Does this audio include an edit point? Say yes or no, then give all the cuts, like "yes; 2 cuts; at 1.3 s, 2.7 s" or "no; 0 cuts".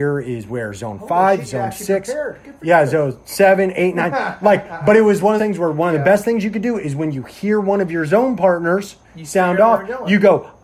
yes; 2 cuts; at 5.4 s, 9.0 s